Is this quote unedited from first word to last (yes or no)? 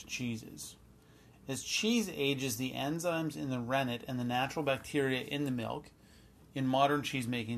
yes